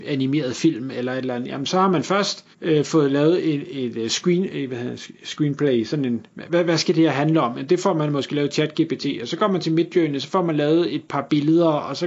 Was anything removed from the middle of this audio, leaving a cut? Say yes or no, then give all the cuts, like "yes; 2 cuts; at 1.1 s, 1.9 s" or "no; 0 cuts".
yes; 1 cut; at 2.5 s